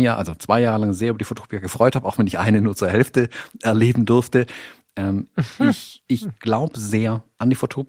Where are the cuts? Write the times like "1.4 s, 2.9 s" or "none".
6.1 s